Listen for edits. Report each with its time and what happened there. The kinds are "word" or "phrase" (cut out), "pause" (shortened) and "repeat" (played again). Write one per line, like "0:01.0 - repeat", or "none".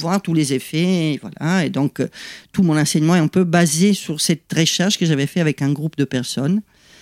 none